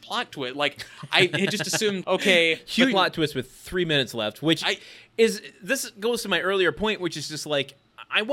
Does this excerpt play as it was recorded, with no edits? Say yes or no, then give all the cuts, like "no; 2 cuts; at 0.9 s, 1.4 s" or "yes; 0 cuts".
no; 2 cuts; at 2.0 s, 2.9 s